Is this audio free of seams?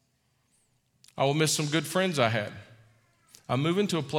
yes; 0 cuts

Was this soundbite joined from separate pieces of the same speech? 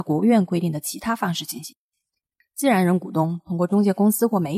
no; 0 cuts

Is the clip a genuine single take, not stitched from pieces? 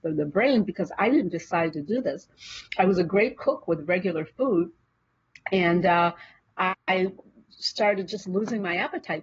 yes; 0 cuts

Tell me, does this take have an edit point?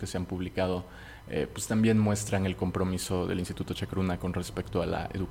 no; 0 cuts

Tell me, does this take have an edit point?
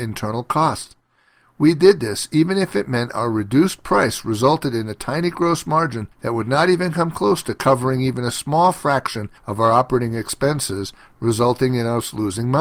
yes; 2 cuts; at 6.1 s, 9.4 s

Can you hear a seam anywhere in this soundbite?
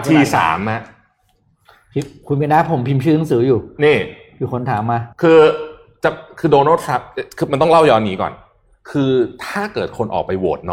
yes; 1 cut; at 5.1 s

